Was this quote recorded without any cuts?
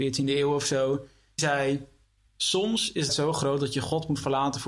no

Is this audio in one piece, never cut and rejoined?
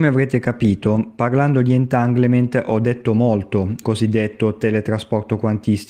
no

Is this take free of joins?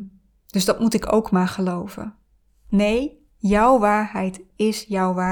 yes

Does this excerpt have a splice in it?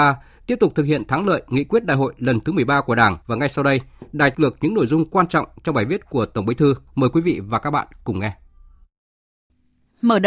yes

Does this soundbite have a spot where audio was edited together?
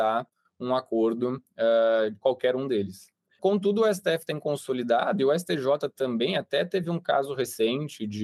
no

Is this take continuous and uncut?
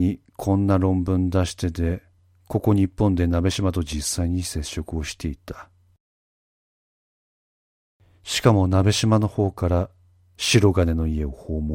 no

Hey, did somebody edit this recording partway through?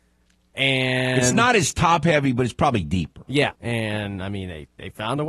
yes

